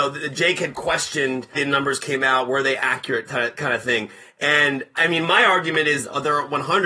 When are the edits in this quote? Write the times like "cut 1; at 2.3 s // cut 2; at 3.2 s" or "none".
cut 1; at 1.5 s // cut 2; at 3.3 s // cut 3; at 4.9 s